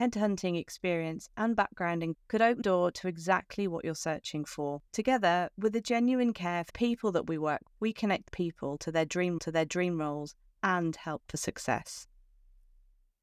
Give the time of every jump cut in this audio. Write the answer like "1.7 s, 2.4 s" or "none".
2.1 s, 2.6 s, 4.9 s, 6.7 s, 7.7 s, 8.3 s, 9.4 s, 11.2 s